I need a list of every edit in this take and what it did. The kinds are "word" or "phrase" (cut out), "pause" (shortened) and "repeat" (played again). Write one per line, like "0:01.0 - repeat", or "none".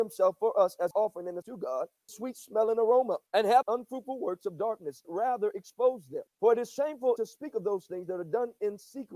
0:00.9 - word
0:01.4 - word
0:02.1 - phrase
0:03.3 - pause
0:03.6 - phrase
0:05.0 - word
0:06.3 - pause
0:07.2 - word